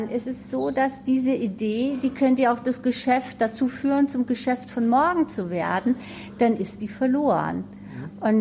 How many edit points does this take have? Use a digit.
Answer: 0